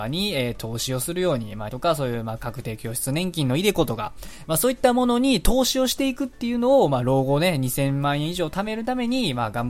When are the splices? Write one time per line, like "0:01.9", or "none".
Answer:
0:01.7